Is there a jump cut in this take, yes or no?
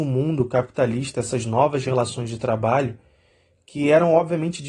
no